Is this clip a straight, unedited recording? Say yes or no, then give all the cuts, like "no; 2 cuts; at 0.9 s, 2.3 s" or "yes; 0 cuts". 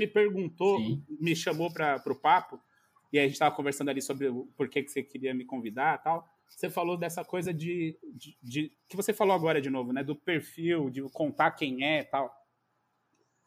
yes; 0 cuts